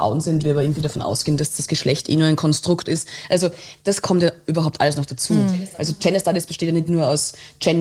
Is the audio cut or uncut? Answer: uncut